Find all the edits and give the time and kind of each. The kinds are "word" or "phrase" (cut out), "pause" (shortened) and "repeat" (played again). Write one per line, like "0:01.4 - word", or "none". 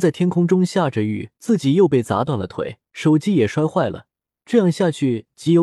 0:01.3 - pause
0:02.9 - pause
0:04.3 - pause